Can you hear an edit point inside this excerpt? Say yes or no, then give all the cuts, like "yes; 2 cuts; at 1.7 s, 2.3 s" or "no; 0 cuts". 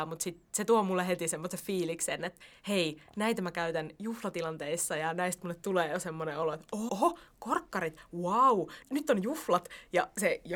yes; 2 cuts; at 6.9 s, 8.8 s